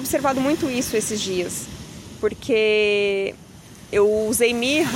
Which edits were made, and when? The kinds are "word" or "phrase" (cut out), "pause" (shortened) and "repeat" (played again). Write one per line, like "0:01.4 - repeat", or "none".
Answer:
none